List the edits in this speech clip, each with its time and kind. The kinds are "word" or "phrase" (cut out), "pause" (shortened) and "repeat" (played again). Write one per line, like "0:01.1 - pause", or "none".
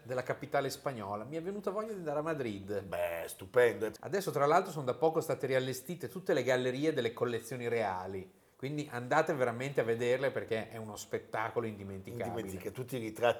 none

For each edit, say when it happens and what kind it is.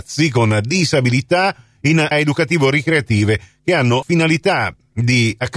0:02.1 - word
0:04.0 - word

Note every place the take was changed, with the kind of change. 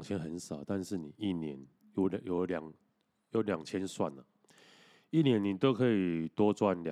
none

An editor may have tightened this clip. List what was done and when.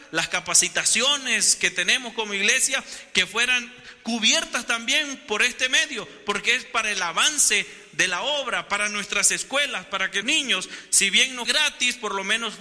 0:10.2 - word
0:11.5 - word

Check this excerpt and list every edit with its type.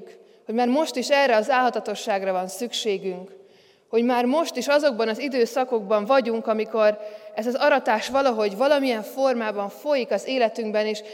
none

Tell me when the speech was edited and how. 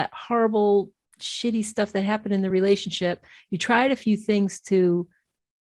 none

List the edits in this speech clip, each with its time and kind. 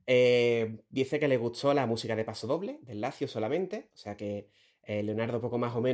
none

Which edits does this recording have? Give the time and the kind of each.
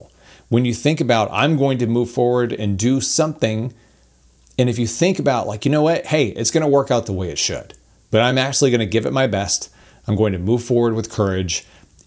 none

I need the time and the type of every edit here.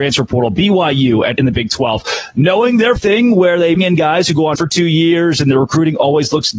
0:01.4 - word
0:03.0 - word
0:03.8 - word
0:04.6 - word

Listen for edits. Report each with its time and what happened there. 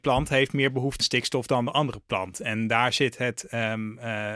0:01.0 - word

